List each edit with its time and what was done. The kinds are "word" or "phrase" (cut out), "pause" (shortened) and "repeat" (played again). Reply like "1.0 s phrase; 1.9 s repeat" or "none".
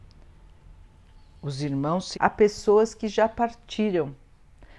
2.1 s word